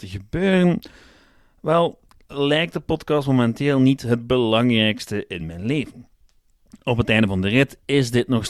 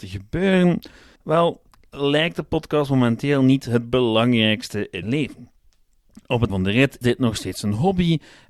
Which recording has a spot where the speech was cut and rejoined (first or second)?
second